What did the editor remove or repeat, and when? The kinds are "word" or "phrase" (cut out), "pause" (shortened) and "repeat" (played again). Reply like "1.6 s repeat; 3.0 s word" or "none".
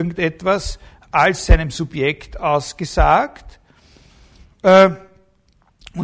none